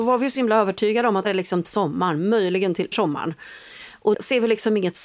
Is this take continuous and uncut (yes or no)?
no